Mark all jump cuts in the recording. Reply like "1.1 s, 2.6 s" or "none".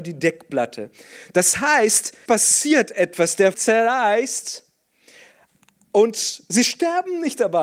2.3 s, 3.5 s